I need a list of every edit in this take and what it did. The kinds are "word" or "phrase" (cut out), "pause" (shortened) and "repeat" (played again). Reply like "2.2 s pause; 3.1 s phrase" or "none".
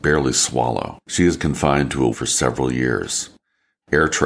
1.0 s pause; 1.4 s word; 2.1 s word